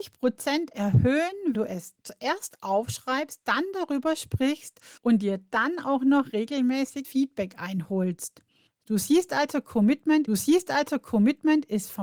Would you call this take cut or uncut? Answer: cut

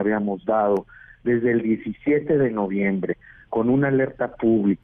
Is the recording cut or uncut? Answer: uncut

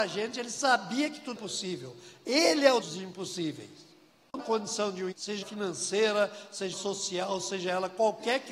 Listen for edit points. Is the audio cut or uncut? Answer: cut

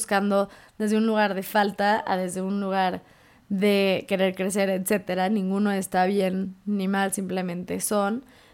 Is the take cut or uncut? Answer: uncut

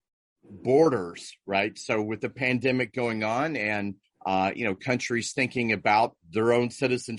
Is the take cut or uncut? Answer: uncut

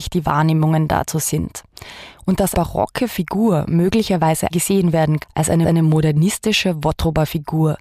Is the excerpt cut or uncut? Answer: cut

